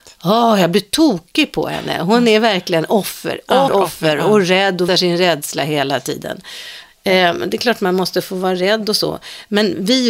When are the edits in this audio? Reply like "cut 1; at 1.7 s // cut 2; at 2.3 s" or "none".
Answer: cut 1; at 3.7 s // cut 2; at 4.9 s